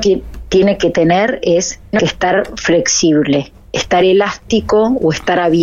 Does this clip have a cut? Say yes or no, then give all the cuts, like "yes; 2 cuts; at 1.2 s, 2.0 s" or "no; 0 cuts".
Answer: no; 0 cuts